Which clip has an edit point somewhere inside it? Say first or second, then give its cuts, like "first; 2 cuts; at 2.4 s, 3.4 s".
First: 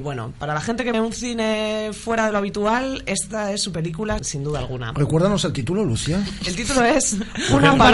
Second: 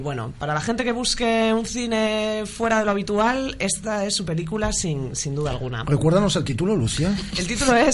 first; 2 cuts; at 0.9 s, 4.2 s